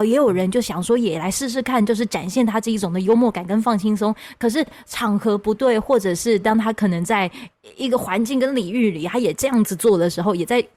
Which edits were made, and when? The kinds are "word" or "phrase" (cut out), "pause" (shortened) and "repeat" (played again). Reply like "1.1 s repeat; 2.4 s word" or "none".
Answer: none